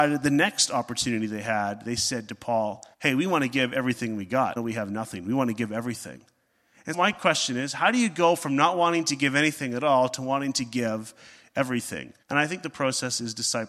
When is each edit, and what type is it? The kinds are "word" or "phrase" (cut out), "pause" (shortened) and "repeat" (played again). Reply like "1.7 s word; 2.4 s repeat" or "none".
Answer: 2.9 s pause; 4.6 s word; 6.9 s word; 12.2 s pause